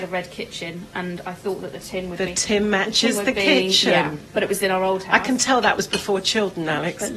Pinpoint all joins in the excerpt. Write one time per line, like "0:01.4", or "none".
none